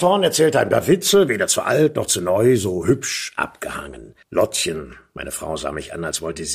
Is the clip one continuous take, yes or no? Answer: no